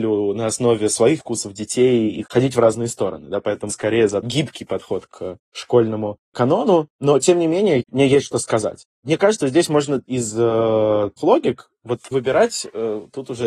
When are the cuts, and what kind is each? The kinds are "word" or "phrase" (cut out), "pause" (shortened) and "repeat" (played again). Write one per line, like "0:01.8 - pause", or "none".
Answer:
0:01.2 - word
0:02.3 - word
0:03.7 - word
0:04.2 - word
0:09.4 - word
0:10.0 - word
0:11.2 - word
0:12.1 - word